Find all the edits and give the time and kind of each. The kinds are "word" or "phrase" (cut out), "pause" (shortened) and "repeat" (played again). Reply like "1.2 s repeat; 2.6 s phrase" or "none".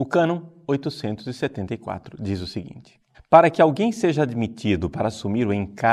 3.1 s pause